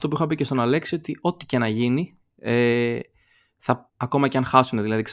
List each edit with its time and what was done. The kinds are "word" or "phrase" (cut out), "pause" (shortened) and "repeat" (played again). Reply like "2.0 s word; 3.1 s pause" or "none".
3.9 s pause